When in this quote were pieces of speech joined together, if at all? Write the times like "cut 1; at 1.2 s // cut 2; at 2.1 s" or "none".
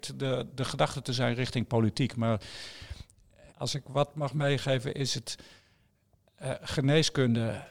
cut 1; at 3.5 s